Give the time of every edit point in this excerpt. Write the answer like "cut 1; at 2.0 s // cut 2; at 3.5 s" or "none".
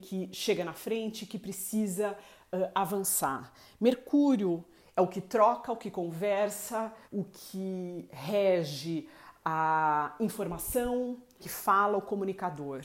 cut 1; at 7.0 s // cut 2; at 11.4 s